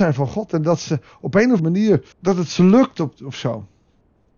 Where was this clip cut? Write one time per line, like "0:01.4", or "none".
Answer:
0:01.6
0:02.1